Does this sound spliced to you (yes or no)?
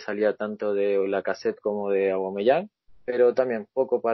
yes